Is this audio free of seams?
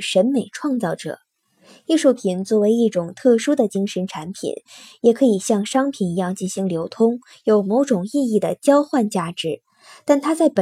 yes; 0 cuts

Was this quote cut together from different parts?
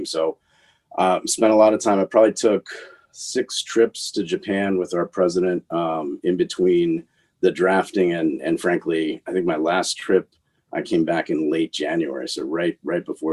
no; 0 cuts

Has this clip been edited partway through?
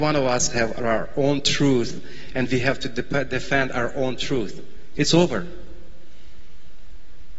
no; 0 cuts

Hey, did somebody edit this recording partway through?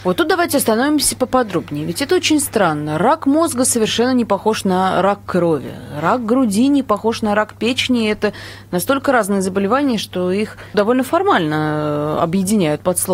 yes; 1 cut; at 10.7 s

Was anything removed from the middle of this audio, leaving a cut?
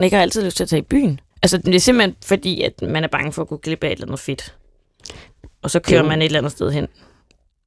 yes; 1 cut; at 1.3 s

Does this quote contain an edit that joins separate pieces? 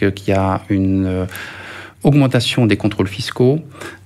no; 0 cuts

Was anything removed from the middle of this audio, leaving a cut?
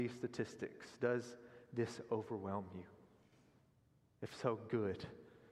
no; 0 cuts

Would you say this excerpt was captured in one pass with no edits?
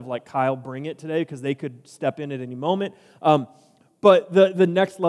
yes; 0 cuts

